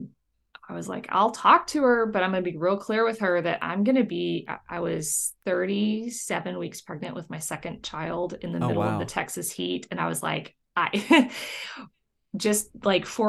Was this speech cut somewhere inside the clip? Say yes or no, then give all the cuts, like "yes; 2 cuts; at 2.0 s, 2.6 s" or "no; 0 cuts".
yes; 2 cuts; at 5.4 s, 10.6 s